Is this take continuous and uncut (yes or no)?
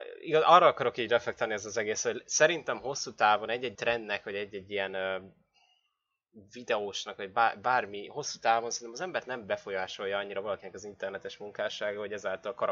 no